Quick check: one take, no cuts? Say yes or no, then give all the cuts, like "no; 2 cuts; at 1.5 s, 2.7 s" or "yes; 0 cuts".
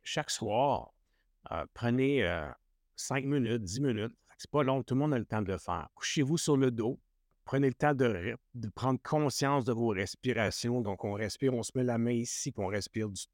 no; 1 cut; at 5.9 s